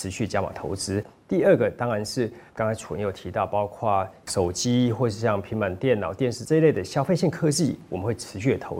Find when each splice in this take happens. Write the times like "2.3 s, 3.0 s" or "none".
2.5 s